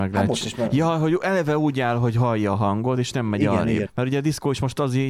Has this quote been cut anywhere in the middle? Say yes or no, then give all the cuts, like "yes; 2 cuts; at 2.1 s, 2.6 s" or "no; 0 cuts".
yes; 1 cut; at 3.9 s